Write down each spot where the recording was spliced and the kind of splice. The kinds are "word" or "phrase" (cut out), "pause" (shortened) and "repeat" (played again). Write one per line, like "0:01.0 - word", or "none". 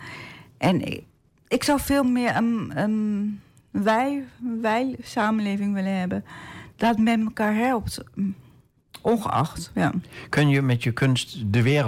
none